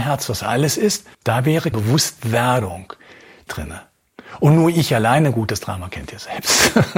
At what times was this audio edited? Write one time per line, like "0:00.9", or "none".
0:01.1
0:01.7
0:03.5